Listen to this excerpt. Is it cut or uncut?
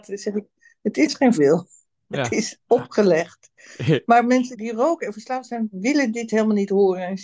cut